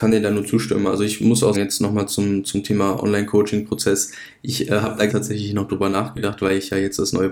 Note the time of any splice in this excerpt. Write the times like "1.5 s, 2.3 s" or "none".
1.5 s, 2.4 s, 5.1 s